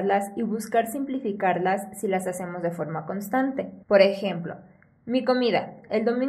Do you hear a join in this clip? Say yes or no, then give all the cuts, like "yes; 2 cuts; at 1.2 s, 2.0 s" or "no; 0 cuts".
yes; 1 cut; at 3.8 s